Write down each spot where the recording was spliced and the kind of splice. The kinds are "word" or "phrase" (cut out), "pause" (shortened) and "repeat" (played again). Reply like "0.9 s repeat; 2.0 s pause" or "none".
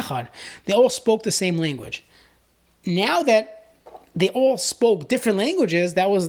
none